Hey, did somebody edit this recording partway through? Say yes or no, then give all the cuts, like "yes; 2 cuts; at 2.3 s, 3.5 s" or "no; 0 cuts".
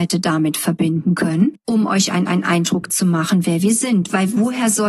yes; 1 cut; at 2.3 s